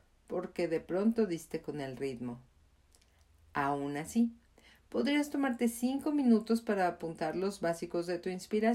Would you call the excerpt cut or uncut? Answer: uncut